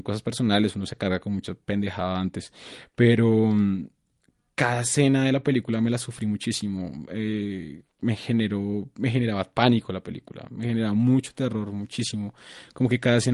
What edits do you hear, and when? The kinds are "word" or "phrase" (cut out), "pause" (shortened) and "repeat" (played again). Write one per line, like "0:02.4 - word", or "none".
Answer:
none